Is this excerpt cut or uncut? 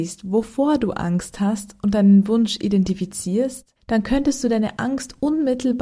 cut